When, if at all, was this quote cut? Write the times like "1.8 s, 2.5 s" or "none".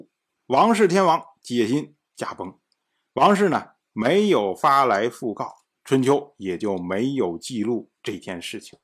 none